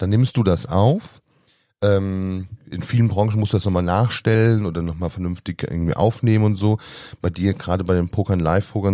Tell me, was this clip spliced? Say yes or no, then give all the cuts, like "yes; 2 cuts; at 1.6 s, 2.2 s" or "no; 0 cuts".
yes; 1 cut; at 2.6 s